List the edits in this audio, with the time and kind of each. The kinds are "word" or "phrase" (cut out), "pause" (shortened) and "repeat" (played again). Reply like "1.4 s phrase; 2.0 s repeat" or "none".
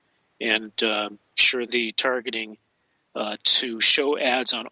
1.4 s word; 1.7 s phrase